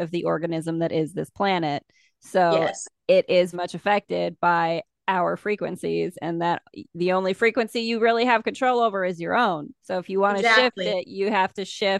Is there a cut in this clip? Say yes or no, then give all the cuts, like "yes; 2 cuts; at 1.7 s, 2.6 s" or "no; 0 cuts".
yes; 2 cuts; at 3.5 s, 9.8 s